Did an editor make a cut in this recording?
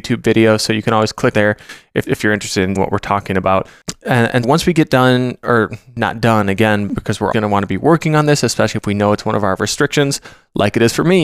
yes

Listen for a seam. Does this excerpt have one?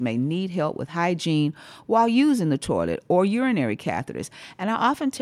no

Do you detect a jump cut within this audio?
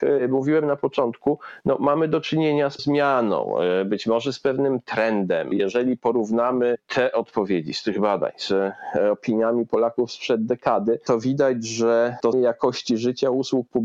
yes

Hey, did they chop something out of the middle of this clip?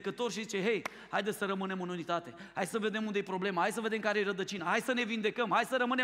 no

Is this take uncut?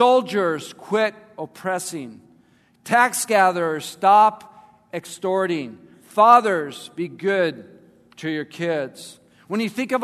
yes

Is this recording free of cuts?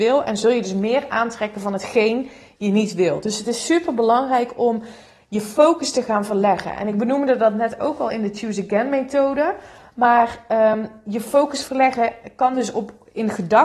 yes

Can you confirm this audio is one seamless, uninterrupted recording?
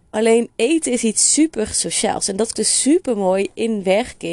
no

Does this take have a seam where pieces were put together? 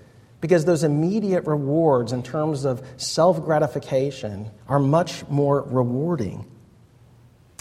yes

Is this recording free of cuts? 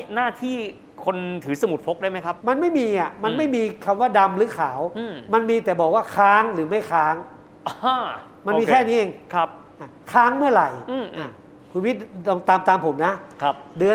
no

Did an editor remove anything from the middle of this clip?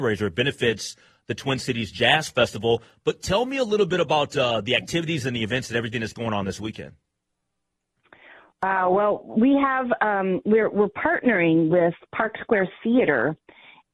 no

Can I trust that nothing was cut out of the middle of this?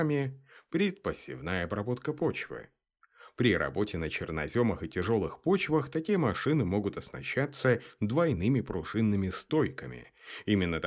yes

